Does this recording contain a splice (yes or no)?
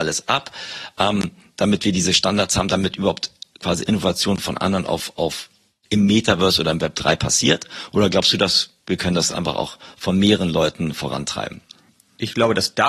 no